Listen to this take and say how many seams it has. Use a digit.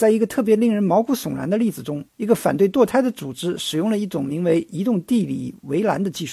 1